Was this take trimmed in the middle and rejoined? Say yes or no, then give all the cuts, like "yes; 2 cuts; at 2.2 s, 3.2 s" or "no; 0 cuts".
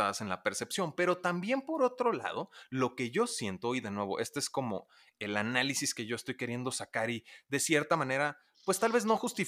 no; 0 cuts